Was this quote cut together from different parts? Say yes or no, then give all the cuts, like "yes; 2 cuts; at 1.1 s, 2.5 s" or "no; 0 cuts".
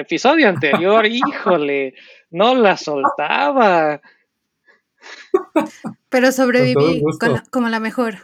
no; 0 cuts